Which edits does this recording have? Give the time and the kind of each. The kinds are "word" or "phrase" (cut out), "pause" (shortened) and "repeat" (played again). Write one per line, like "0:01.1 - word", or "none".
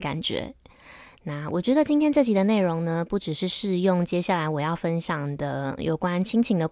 0:05.8 - word